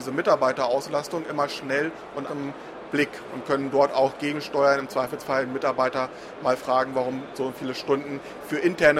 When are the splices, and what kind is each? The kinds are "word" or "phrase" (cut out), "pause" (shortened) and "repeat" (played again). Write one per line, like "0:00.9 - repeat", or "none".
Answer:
0:02.3 - word

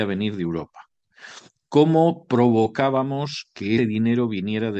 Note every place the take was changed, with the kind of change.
0:03.8 - word

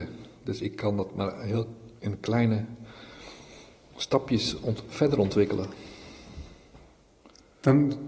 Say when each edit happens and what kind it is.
none

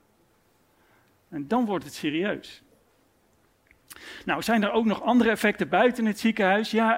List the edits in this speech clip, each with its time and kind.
none

